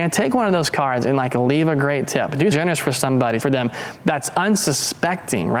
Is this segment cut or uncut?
cut